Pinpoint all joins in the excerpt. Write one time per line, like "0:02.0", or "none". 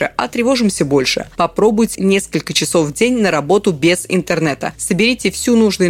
0:01.9